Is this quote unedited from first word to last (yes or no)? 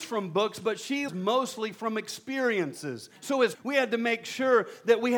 no